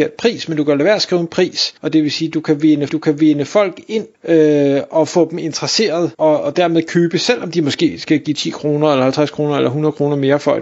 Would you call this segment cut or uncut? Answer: cut